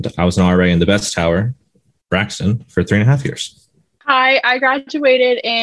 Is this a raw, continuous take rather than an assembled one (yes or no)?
yes